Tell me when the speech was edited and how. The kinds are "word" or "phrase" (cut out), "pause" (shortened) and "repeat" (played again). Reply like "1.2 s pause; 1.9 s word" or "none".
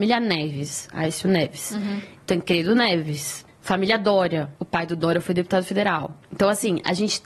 3.5 s pause; 4.6 s pause; 6.2 s pause